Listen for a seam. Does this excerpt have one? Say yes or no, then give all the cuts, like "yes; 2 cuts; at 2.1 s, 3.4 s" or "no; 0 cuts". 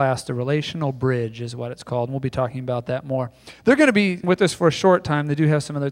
yes; 1 cut; at 4.2 s